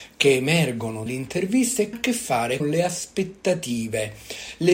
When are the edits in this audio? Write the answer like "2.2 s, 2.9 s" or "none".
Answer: 1.1 s, 1.9 s, 2.6 s

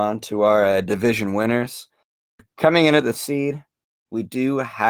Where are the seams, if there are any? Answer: 3.1 s

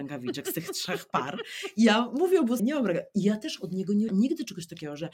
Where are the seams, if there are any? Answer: 2.6 s, 4.1 s

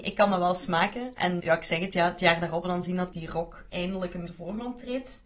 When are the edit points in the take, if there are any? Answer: 1.4 s, 2.6 s, 3.1 s, 4.3 s

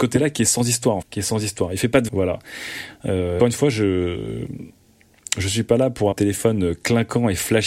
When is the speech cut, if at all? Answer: 1.0 s, 2.1 s, 3.4 s, 6.1 s

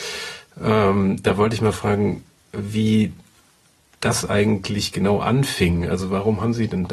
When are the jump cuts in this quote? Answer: none

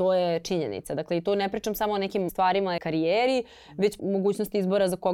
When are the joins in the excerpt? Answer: 2.3 s, 2.8 s, 4.0 s

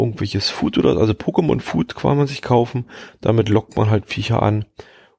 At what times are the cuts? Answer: none

